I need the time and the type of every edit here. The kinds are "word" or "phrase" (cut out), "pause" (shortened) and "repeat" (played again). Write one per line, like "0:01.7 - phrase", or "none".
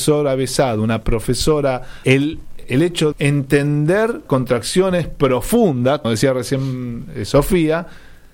0:02.0 - word
0:02.6 - word
0:03.1 - word
0:04.3 - word
0:06.0 - word